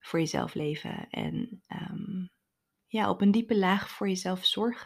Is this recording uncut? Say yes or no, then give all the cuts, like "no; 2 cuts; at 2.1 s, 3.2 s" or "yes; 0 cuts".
yes; 0 cuts